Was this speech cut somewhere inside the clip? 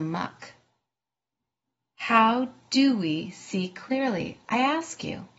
no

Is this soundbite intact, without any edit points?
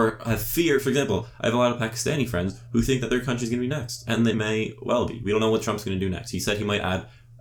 no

